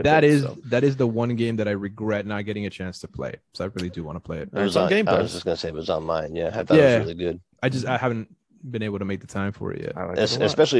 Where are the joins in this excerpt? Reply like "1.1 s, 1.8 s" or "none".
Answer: none